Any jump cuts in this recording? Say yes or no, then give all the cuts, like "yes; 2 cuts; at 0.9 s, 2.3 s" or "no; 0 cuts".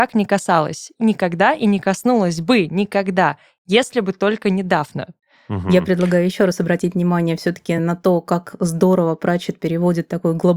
no; 0 cuts